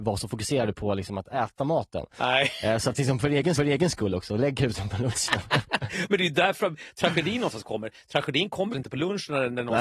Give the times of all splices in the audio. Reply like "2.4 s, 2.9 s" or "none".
3.6 s, 8.7 s